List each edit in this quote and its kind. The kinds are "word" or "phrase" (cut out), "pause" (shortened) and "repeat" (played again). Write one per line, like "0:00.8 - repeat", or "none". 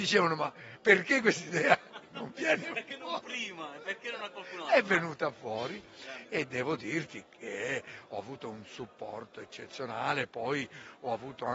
none